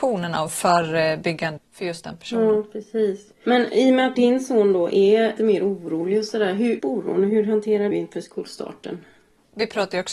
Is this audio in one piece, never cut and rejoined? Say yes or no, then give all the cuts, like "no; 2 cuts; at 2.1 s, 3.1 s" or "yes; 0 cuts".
no; 6 cuts; at 1.6 s, 3.3 s, 4.1 s, 5.4 s, 6.8 s, 7.9 s